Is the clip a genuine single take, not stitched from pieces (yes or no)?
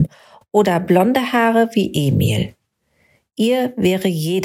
yes